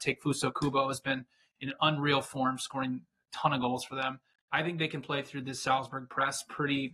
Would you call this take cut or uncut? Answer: uncut